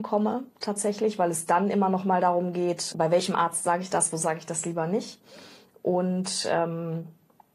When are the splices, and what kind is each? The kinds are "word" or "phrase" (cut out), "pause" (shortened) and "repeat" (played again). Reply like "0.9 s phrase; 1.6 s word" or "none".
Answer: 2.9 s word